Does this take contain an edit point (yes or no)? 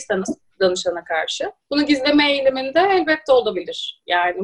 yes